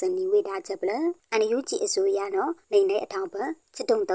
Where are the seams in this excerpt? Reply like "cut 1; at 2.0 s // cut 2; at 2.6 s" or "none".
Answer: none